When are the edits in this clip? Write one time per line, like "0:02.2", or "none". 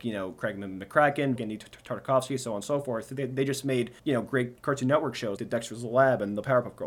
0:01.4
0:04.0
0:04.6
0:05.4

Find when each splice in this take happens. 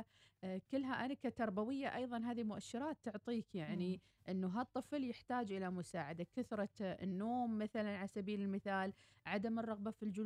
none

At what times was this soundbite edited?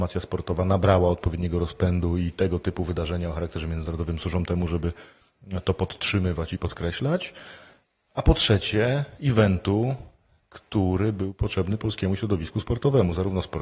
none

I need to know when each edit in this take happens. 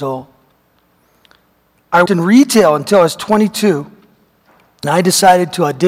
0:02.1
0:04.8

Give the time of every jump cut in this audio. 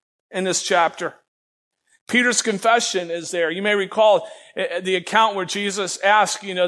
none

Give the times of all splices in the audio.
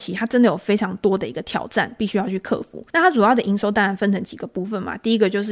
0:02.9

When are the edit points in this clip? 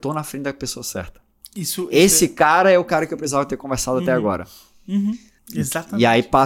0:05.4

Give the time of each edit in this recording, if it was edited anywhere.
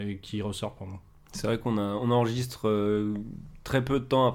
none

